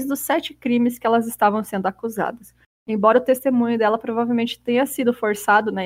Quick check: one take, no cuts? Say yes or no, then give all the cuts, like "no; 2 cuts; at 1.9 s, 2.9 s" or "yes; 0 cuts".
yes; 0 cuts